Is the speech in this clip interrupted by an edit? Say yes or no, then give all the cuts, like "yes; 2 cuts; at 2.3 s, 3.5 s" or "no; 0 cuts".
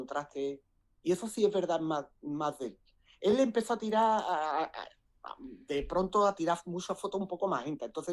no; 0 cuts